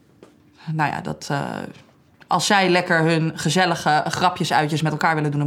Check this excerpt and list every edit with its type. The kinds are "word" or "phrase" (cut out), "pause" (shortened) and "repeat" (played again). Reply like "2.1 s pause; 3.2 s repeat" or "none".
none